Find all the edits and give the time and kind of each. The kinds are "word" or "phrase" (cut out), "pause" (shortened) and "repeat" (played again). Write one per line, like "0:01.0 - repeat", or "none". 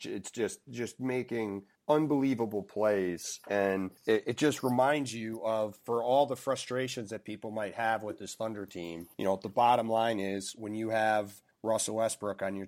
0:04.0 - pause
0:09.1 - pause

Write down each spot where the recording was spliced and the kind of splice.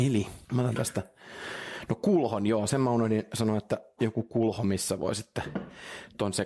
none

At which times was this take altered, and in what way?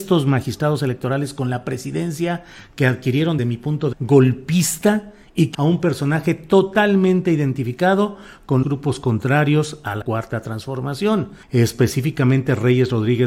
0:03.4 - phrase
0:03.9 - word
0:05.5 - phrase
0:08.6 - word
0:10.0 - word
0:11.4 - pause

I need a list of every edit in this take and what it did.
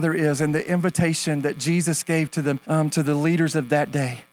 0:02.6 - pause

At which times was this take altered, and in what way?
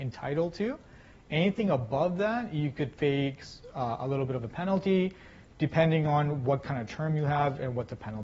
none

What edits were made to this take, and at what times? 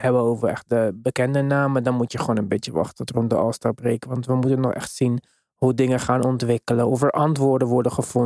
none

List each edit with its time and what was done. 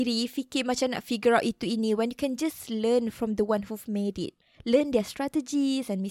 none

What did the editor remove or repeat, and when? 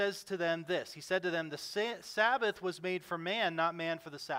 none

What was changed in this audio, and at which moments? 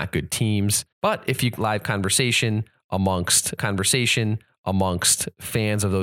0:00.9 - pause
0:01.6 - word
0:03.6 - repeat

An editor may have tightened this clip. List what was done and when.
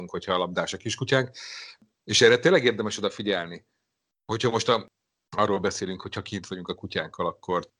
none

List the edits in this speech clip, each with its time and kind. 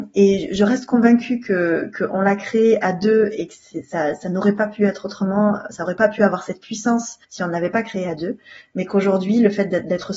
0:07.2 - pause

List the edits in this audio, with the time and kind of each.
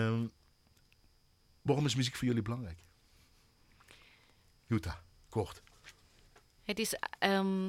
none

